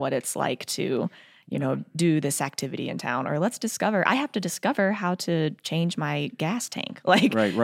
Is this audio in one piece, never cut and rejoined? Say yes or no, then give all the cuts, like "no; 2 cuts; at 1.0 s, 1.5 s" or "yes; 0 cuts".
yes; 0 cuts